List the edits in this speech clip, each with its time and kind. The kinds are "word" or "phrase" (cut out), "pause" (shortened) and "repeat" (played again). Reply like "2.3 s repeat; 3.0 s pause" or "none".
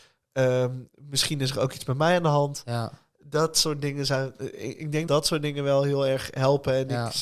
5.1 s word